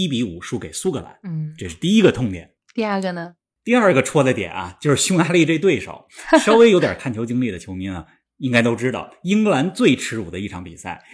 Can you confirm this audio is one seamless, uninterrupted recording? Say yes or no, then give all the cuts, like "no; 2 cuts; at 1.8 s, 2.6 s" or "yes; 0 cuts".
yes; 0 cuts